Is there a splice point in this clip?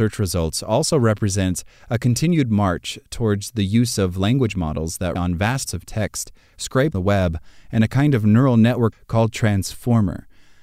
yes; 4 cuts; at 5.2 s, 5.7 s, 6.9 s, 8.9 s

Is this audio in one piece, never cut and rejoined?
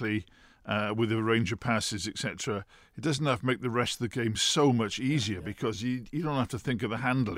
yes; 0 cuts

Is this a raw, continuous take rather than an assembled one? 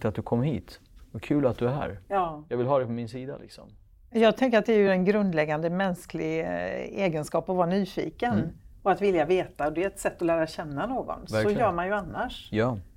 yes; 0 cuts

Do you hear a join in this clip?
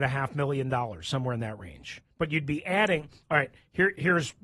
yes; 1 cut; at 2.1 s

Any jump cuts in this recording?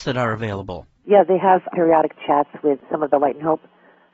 no; 0 cuts

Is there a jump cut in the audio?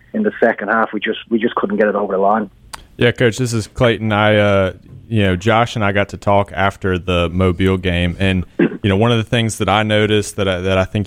no; 0 cuts

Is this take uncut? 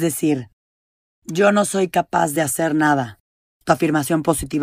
yes; 0 cuts

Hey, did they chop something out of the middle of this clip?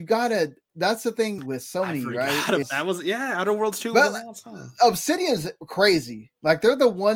yes; 2 cuts; at 1.4 s, 2.6 s

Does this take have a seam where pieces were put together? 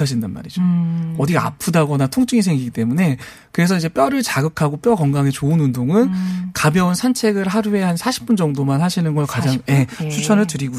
no; 0 cuts

